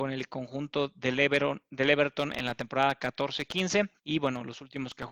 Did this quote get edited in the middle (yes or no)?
yes